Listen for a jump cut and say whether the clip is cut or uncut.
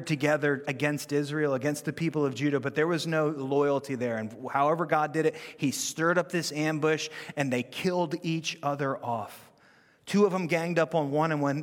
uncut